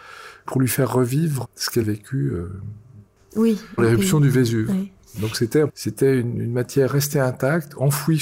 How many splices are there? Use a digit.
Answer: 4